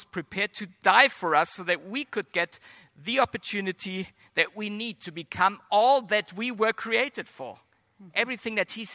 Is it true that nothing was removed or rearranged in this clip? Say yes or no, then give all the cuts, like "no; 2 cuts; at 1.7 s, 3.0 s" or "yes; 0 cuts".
yes; 0 cuts